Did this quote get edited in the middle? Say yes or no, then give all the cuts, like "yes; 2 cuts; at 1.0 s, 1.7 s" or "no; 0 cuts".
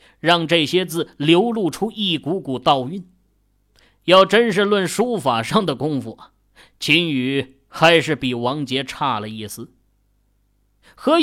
no; 0 cuts